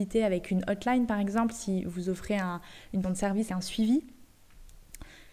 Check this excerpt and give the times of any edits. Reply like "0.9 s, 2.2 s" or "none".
3.0 s, 3.5 s